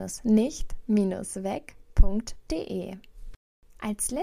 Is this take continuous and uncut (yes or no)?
yes